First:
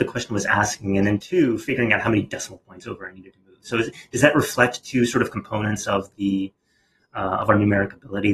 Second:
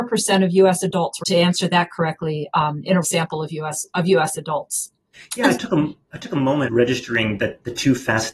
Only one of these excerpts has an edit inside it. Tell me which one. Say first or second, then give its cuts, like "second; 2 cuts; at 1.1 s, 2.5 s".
second; 5 cuts; at 1.2 s, 3.0 s, 5.1 s, 6.0 s, 6.7 s